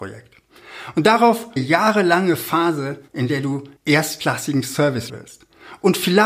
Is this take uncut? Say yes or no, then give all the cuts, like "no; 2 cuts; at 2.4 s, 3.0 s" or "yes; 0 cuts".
no; 4 cuts; at 1.6 s, 3.1 s, 3.8 s, 5.1 s